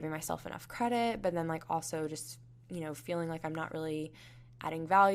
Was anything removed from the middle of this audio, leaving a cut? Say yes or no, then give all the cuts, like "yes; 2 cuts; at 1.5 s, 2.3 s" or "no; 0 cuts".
no; 0 cuts